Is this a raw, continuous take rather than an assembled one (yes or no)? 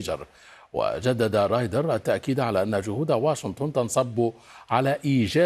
yes